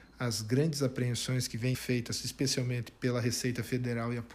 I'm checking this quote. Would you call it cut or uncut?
cut